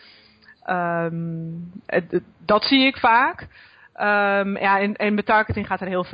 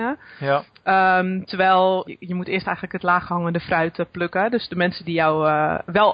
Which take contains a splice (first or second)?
second